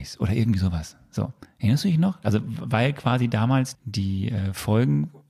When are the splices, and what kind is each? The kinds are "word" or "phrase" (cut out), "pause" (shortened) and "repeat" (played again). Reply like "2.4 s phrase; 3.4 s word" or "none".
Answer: 3.7 s word